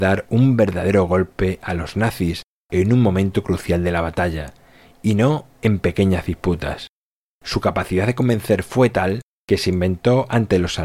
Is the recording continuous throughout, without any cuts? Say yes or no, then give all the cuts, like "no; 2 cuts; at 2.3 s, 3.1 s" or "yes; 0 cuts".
yes; 0 cuts